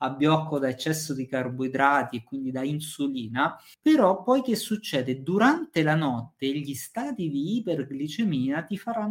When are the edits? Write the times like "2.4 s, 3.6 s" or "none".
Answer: 3.7 s